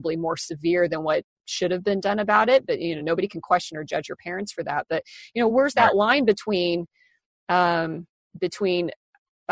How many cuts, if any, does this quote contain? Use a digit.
0